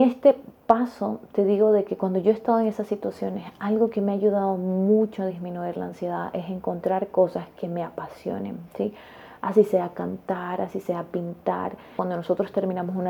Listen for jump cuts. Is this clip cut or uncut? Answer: uncut